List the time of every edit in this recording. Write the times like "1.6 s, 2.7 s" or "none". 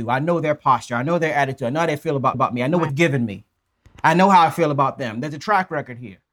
2.3 s, 2.9 s